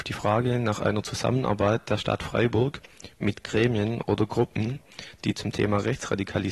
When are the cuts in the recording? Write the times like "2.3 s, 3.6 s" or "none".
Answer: none